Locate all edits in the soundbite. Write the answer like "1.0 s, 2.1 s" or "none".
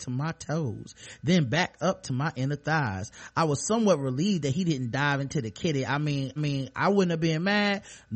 6.4 s